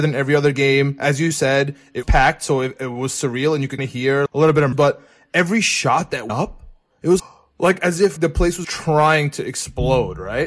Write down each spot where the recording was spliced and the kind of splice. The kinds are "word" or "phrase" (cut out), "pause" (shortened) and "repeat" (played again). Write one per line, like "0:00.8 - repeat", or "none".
0:02.0 - word
0:02.8 - word
0:03.8 - word
0:04.3 - word
0:04.7 - word
0:06.3 - word
0:07.2 - word
0:08.2 - word
0:08.6 - word